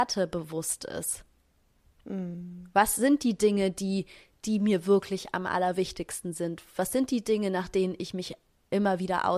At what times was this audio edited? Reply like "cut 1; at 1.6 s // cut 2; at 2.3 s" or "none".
none